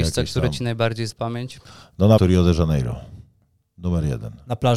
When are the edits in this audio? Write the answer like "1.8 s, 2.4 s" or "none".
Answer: 1.1 s, 2.2 s